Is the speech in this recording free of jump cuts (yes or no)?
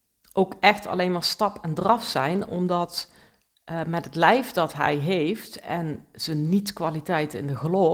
yes